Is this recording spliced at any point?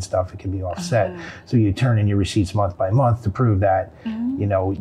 no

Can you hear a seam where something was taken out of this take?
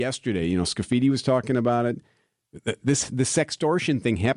no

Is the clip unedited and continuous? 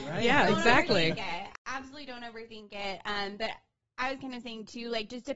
yes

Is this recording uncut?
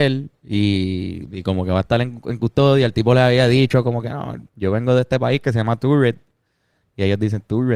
no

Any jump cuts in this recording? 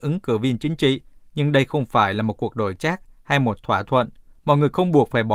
no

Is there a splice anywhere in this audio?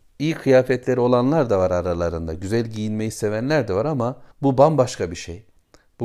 yes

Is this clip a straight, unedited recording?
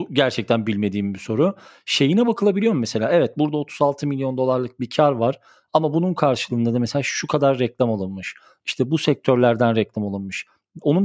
yes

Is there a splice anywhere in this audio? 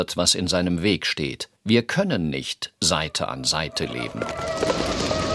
yes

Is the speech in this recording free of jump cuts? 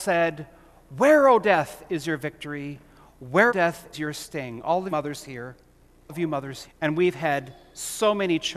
no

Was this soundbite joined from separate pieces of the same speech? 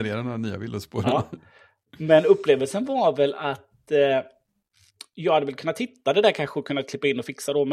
no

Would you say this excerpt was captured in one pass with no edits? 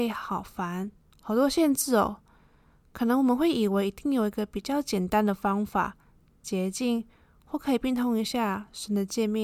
yes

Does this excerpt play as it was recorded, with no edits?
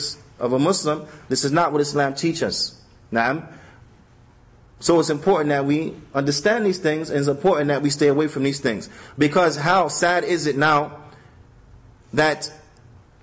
yes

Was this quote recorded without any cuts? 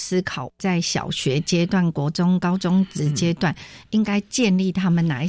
yes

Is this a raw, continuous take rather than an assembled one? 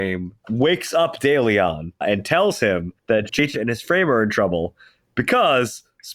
no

